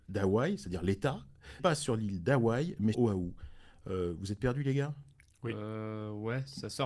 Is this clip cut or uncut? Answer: cut